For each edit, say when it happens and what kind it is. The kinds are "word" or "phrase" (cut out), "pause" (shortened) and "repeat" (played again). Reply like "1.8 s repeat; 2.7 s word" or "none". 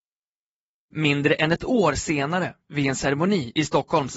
none